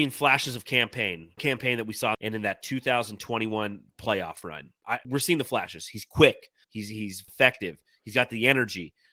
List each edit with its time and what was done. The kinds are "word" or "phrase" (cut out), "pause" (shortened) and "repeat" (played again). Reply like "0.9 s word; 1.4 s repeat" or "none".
1.4 s phrase; 2.1 s phrase; 5.0 s word; 6.6 s pause; 7.3 s phrase